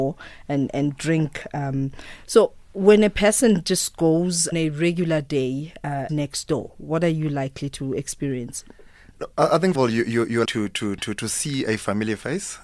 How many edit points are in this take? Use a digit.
4